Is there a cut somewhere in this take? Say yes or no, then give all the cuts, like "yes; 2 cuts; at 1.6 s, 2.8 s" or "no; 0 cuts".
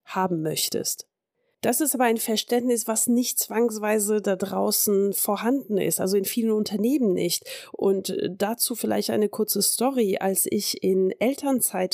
no; 0 cuts